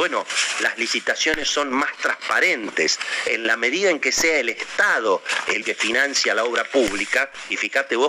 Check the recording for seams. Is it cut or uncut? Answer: cut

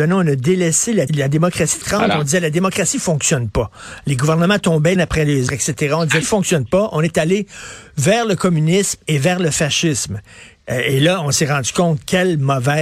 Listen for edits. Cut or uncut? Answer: cut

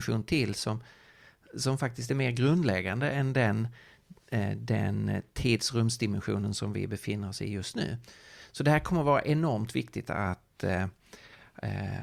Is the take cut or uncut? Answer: uncut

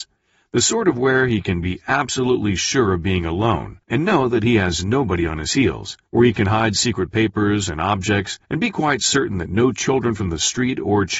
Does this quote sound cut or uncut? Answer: cut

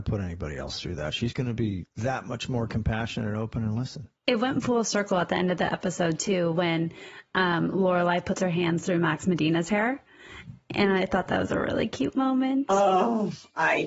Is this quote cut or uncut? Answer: cut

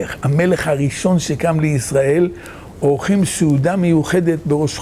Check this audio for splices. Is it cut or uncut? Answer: uncut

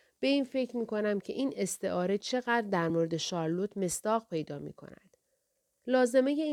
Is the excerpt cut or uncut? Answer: uncut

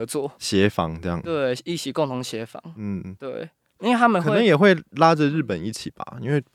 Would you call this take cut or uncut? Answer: uncut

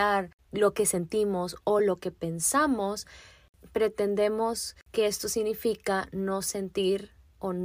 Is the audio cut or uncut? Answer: uncut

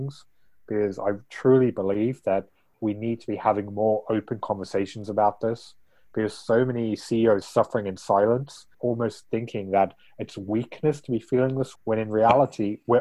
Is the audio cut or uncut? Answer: cut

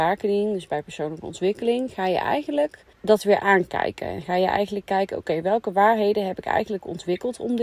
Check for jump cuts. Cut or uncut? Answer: cut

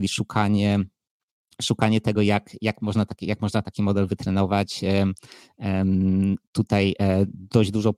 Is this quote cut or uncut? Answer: uncut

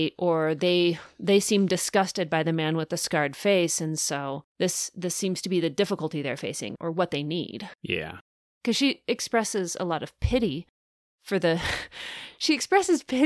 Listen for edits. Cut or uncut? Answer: cut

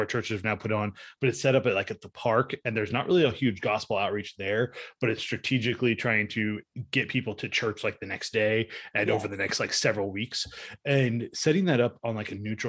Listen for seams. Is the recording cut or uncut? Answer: uncut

